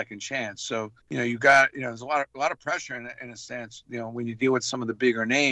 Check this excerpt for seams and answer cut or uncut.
cut